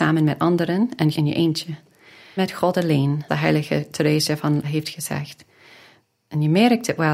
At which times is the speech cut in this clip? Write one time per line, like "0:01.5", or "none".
0:01.1
0:02.4
0:03.3
0:04.6